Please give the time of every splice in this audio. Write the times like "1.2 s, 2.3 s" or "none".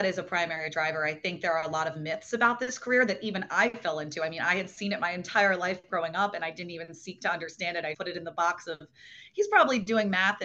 7.9 s